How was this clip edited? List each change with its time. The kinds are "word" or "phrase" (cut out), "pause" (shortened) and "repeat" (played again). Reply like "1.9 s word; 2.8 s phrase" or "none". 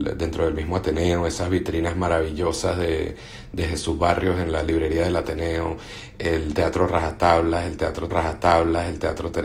8.1 s repeat

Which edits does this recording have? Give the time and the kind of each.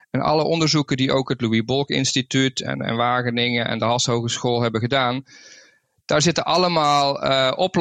none

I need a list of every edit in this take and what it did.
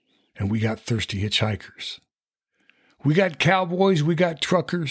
none

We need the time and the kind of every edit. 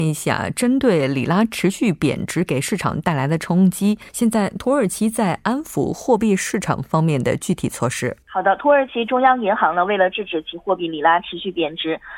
4.1 s pause; 8.2 s pause

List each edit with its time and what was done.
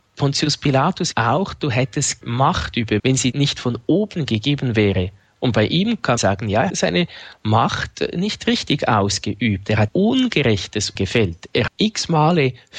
1.1 s word; 2.2 s word; 3.0 s word; 3.3 s word; 6.2 s word; 6.7 s word; 9.9 s word; 11.0 s word; 11.7 s word

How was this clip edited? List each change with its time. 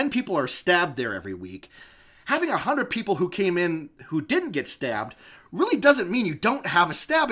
none

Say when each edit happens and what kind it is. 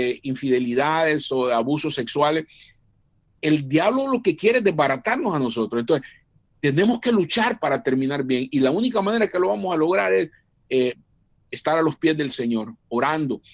none

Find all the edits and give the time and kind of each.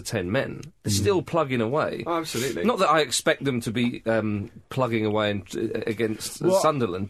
4.6 s pause

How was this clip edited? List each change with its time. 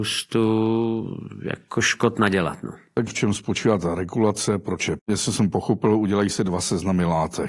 3.1 s word; 5.0 s phrase

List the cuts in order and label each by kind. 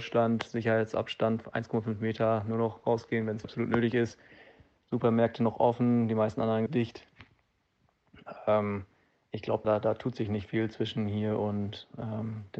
3.4 s word; 6.7 s word; 9.6 s word

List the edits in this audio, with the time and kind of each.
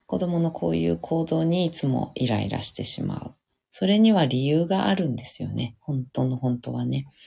none

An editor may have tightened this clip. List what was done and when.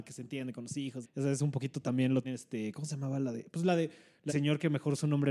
1.0 s word; 2.2 s word; 4.3 s word

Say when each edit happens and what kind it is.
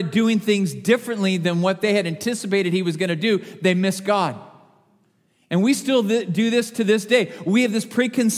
none

